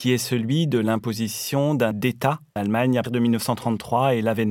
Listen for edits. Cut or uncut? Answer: cut